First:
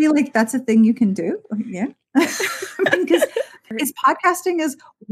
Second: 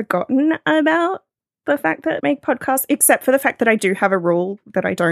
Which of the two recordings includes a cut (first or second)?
second